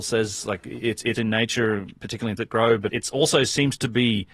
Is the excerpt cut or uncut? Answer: cut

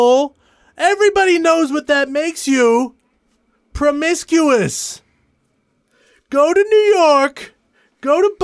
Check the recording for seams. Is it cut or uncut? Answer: uncut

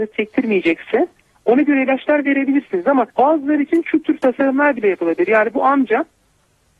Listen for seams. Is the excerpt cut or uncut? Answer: cut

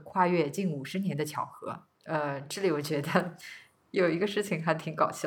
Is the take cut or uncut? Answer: cut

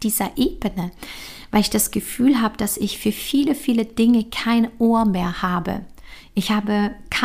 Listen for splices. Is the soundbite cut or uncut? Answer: uncut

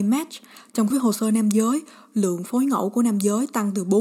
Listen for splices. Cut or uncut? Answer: cut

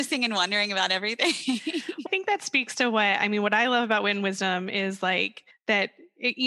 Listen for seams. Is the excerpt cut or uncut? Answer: cut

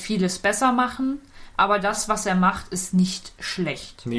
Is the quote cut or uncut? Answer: uncut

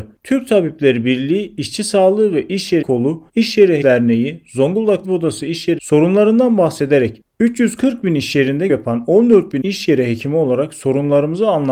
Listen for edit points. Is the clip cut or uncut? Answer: cut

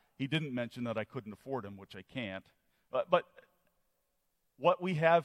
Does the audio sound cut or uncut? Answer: uncut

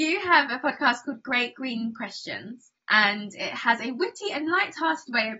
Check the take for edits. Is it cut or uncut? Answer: uncut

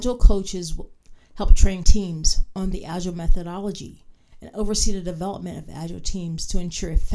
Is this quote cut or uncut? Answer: cut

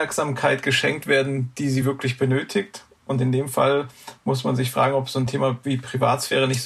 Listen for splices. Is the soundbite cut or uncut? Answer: uncut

